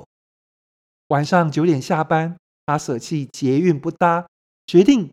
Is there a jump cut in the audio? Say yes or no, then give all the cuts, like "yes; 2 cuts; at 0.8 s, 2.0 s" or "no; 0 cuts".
no; 0 cuts